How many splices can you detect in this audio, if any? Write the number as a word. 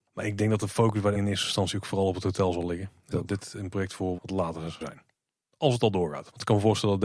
four